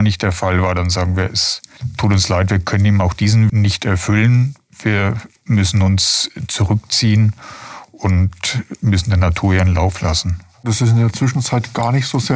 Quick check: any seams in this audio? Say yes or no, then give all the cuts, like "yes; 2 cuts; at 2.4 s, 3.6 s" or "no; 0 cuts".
yes; 2 cuts; at 3.5 s, 5.4 s